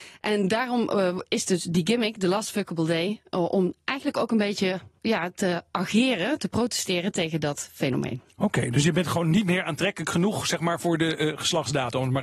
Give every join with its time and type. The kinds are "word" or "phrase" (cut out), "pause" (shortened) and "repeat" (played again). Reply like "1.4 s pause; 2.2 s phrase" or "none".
5.0 s word